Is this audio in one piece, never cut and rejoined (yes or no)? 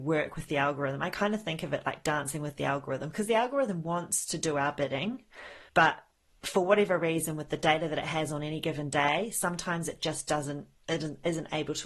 no